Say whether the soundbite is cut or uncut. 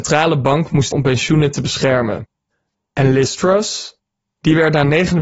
cut